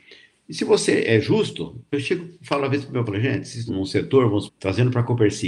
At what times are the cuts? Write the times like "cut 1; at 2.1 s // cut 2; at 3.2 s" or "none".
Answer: cut 1; at 1.9 s // cut 2; at 3.0 s // cut 3; at 3.7 s // cut 4; at 4.5 s

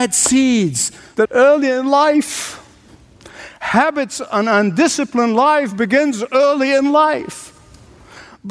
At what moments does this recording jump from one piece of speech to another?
cut 1; at 1.2 s

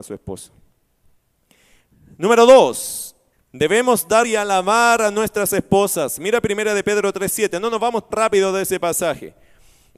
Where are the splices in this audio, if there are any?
cut 1; at 3.3 s // cut 2; at 4.2 s // cut 3; at 8.1 s

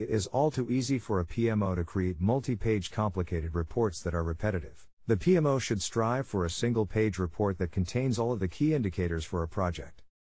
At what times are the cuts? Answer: cut 1; at 4.9 s

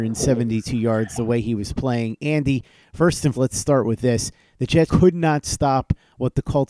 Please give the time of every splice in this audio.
cut 1; at 3.3 s // cut 2; at 4.9 s

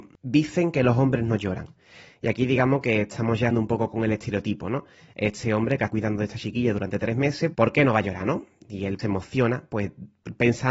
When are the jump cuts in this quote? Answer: cut 1; at 3.5 s // cut 2; at 5.9 s // cut 3; at 7.5 s // cut 4; at 9.0 s

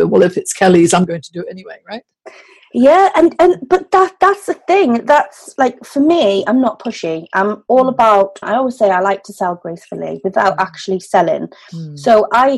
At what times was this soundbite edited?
cut 1; at 8.4 s

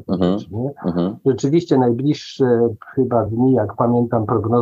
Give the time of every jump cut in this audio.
none

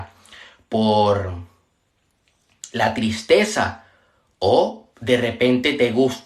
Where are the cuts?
cut 1; at 4.9 s

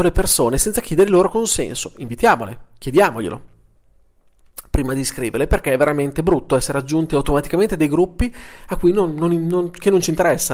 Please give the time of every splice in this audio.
none

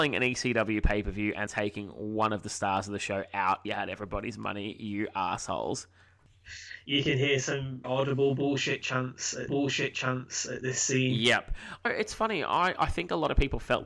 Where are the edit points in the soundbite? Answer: cut 1; at 1.5 s // cut 2; at 3.6 s // cut 3; at 7.8 s // cut 4; at 9.5 s // cut 5; at 11.9 s

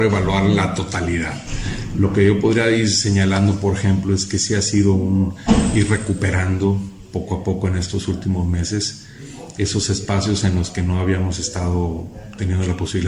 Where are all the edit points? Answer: none

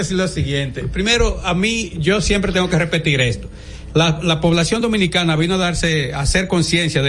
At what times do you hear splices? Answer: none

